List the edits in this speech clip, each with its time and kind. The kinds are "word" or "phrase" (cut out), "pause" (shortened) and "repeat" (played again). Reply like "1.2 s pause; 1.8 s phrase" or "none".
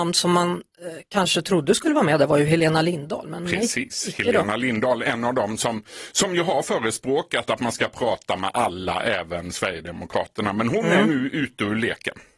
none